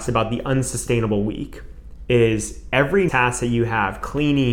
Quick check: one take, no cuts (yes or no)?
no